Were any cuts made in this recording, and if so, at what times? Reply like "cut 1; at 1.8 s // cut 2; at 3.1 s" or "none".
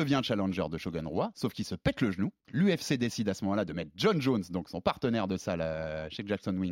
cut 1; at 2.4 s